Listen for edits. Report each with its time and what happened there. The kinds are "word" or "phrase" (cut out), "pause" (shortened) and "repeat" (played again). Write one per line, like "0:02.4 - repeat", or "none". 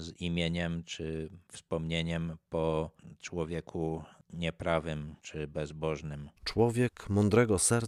0:05.2 - pause
0:06.4 - pause